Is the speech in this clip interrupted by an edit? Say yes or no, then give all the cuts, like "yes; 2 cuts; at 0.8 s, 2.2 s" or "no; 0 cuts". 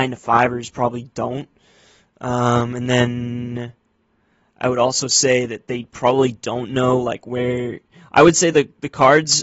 no; 0 cuts